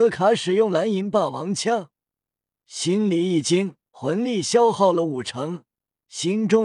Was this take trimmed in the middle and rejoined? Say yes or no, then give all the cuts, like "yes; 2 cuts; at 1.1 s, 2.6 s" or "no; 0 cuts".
yes; 1 cut; at 3.9 s